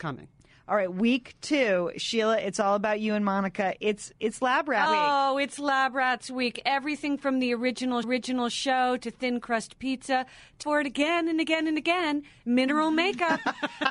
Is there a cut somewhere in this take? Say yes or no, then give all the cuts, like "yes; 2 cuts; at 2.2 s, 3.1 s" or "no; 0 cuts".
yes; 3 cuts; at 4.9 s, 8.0 s, 10.6 s